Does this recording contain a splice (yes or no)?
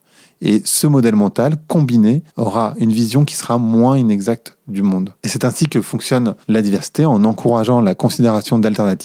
yes